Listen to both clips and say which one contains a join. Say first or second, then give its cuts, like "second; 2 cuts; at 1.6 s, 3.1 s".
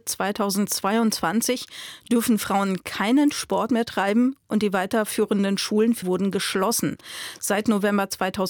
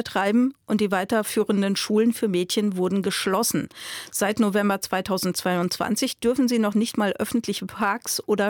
first; 1 cut; at 6.0 s